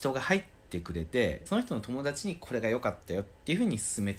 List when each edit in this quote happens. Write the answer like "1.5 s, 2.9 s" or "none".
1.5 s